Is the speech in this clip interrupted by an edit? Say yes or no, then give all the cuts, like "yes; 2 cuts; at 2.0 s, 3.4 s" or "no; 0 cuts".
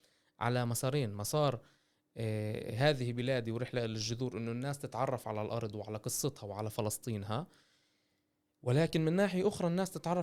no; 0 cuts